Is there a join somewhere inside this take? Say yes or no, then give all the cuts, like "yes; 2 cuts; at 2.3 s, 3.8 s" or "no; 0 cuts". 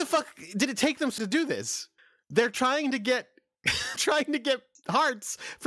yes; 3 cuts; at 1.2 s, 2.0 s, 4.0 s